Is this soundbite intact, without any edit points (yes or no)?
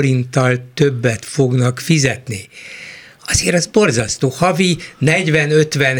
yes